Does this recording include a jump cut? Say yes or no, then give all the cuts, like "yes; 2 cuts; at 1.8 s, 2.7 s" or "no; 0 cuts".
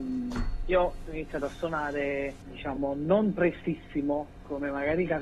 yes; 1 cut; at 2.4 s